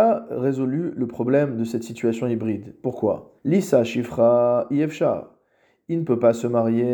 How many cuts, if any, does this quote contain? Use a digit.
1